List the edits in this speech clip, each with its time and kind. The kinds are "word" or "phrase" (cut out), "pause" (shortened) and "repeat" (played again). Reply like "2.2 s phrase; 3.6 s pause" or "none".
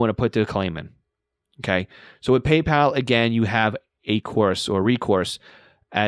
none